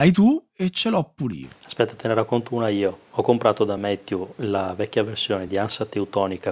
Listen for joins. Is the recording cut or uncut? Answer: uncut